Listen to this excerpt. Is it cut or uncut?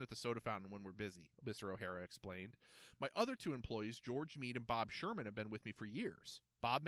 cut